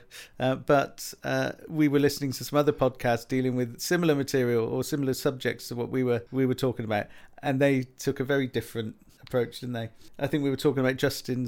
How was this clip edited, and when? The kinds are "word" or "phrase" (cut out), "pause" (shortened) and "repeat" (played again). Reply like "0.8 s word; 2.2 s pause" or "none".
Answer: 1.6 s pause; 6.3 s pause